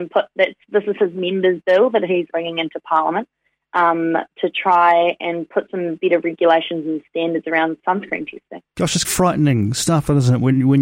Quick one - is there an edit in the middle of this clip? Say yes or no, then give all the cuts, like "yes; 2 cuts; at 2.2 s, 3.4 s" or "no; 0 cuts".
yes; 2 cuts; at 2.3 s, 9.0 s